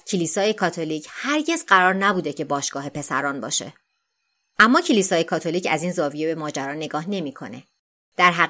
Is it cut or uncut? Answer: uncut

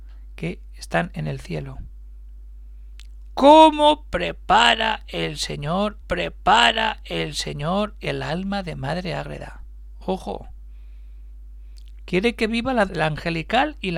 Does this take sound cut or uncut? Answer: cut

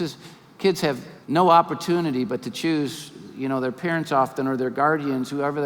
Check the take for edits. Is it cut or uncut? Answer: cut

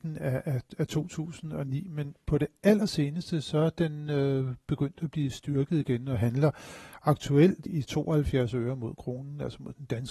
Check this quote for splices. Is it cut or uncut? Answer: cut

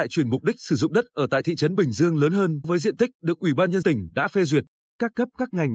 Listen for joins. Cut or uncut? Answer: cut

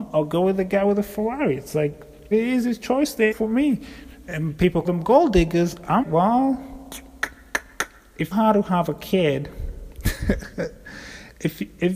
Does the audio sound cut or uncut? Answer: cut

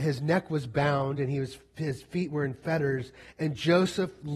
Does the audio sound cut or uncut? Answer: uncut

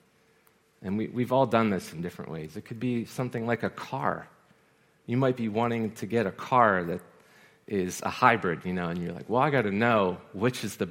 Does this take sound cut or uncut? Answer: uncut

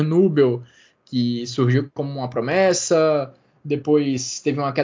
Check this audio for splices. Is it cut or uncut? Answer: uncut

